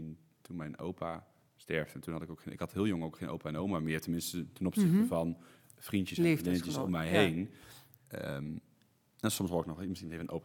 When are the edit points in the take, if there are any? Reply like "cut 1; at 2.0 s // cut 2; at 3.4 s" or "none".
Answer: none